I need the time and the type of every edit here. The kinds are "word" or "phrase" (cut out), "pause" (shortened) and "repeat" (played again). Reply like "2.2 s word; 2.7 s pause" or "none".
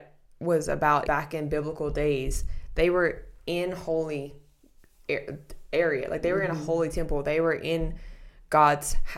1.1 s word